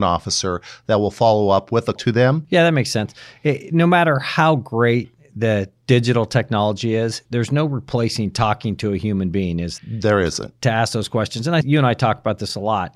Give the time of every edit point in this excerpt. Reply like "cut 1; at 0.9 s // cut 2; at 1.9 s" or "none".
cut 1; at 2.0 s // cut 2; at 7.3 s // cut 3; at 9.8 s // cut 4; at 11.6 s